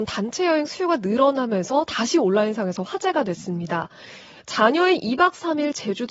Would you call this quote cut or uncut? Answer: uncut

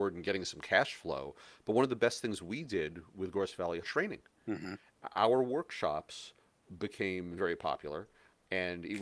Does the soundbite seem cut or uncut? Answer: cut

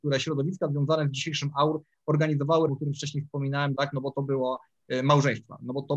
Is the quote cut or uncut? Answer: cut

